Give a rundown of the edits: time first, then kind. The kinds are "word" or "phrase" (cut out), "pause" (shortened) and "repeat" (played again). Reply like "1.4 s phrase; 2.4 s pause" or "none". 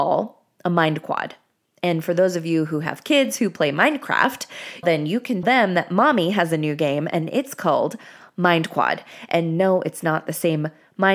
4.8 s word; 5.4 s word